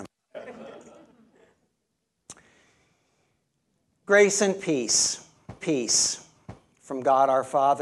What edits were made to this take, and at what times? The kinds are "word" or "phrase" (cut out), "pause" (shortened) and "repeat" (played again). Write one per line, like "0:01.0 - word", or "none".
0:05.6 - repeat